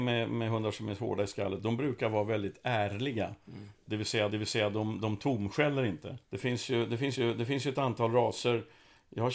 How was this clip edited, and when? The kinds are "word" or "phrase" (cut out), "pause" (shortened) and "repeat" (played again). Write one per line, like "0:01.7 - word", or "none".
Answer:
0:04.3 - repeat
0:06.2 - pause
0:07.1 - repeat